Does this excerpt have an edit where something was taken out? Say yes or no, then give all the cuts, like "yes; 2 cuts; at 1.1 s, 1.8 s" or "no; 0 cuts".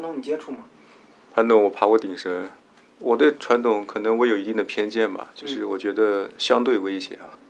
no; 0 cuts